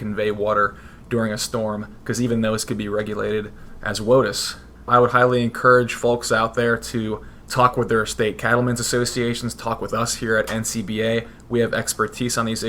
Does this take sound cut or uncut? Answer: uncut